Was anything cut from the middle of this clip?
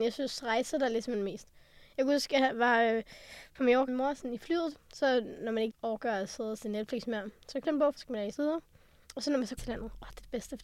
yes; 6 cuts; at 3.9 s, 5.7 s, 7.6 s, 8.0 s, 8.4 s, 9.6 s

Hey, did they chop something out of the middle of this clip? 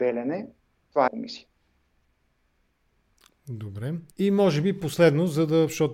yes; 2 cuts; at 1.1 s, 4.1 s

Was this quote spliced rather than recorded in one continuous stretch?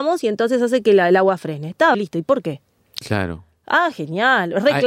yes; 1 cut; at 1.9 s

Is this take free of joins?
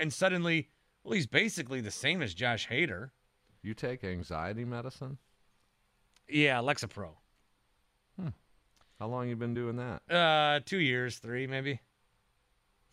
yes; 0 cuts

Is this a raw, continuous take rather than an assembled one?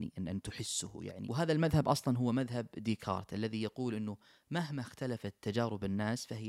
yes; 0 cuts

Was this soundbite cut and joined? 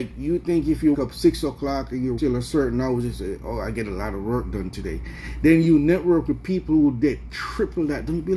yes; 2 cuts; at 0.9 s, 2.2 s

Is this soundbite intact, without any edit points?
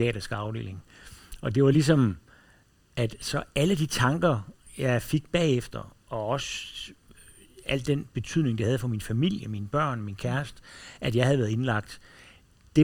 yes; 0 cuts

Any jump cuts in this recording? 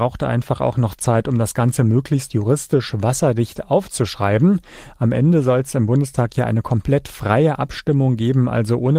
no; 0 cuts

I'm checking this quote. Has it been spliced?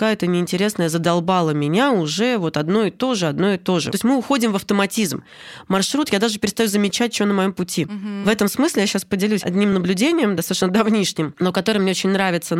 no; 0 cuts

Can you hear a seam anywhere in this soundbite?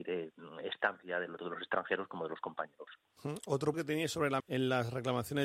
yes; 3 cuts; at 1.4 s, 3.7 s, 4.4 s

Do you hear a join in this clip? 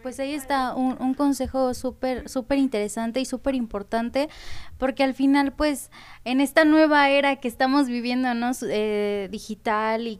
no; 0 cuts

